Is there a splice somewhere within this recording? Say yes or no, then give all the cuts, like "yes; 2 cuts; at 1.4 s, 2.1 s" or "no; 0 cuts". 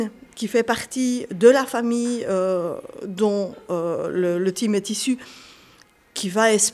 no; 0 cuts